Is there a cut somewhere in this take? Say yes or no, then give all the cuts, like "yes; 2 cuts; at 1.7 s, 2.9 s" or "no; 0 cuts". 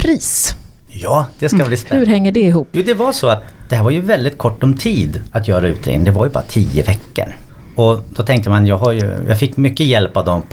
no; 0 cuts